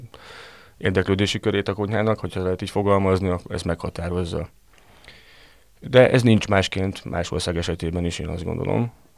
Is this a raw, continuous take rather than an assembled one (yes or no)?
yes